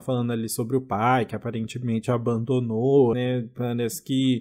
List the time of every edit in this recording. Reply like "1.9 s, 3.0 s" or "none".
3.1 s